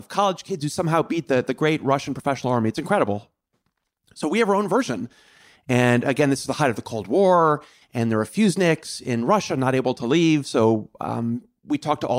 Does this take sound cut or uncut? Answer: uncut